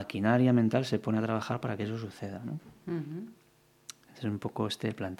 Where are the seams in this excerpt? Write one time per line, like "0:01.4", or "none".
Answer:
none